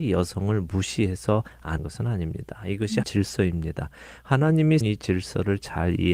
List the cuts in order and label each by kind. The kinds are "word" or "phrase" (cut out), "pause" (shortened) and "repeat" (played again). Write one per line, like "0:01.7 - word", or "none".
0:01.8 - word
0:03.0 - word
0:04.8 - word